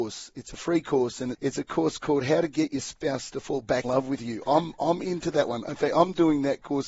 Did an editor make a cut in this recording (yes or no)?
yes